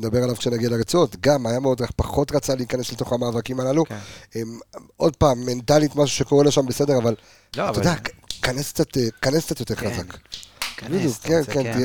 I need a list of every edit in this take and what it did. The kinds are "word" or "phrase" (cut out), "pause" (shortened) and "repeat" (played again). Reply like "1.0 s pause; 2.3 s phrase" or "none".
none